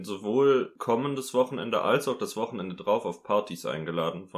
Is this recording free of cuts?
yes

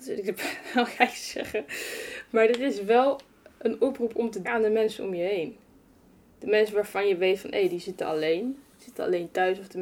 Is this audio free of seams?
no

